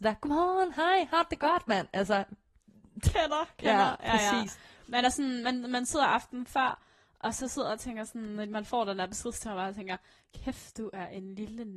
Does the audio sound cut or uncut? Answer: uncut